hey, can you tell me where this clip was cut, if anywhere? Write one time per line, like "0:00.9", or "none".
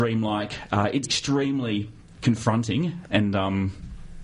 0:01.0